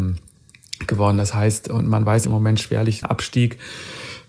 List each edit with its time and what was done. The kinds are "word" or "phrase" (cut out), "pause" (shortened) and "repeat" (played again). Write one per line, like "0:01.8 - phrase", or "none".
0:02.2 - phrase
0:03.0 - word